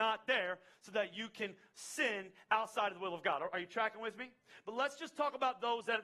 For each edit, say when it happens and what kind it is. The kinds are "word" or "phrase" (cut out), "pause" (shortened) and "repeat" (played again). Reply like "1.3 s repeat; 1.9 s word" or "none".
none